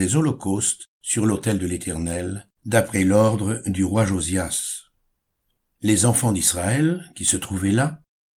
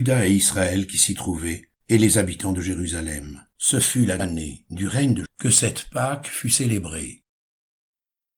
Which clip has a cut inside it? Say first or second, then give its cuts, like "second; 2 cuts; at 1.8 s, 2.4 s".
second; 4 cuts; at 1.8 s, 3.5 s, 4.2 s, 5.3 s